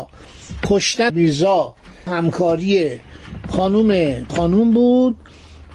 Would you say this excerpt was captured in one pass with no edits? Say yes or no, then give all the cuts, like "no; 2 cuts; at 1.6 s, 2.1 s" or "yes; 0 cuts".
no; 3 cuts; at 1.1 s, 2.1 s, 4.3 s